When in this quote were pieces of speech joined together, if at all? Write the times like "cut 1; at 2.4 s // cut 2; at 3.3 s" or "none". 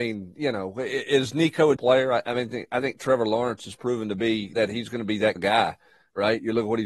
cut 1; at 1.8 s // cut 2; at 4.5 s // cut 3; at 5.4 s